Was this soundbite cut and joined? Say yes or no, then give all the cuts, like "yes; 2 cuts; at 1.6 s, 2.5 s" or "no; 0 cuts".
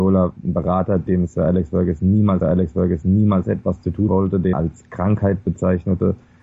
yes; 4 cuts; at 1.1 s, 2.4 s, 4.1 s, 4.5 s